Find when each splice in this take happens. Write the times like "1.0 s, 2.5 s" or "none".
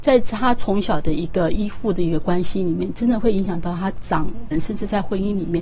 4.5 s